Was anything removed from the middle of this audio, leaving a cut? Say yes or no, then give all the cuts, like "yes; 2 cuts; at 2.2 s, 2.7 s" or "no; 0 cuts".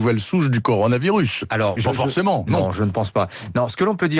yes; 1 cut; at 1.8 s